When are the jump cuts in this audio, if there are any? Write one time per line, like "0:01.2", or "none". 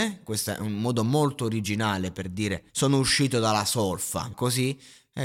0:02.7
0:04.3